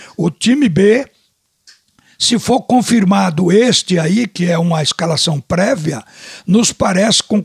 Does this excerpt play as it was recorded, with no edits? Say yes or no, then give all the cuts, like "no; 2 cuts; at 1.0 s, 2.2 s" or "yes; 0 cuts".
yes; 0 cuts